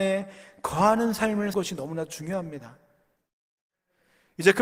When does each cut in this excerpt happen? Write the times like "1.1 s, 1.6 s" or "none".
1.5 s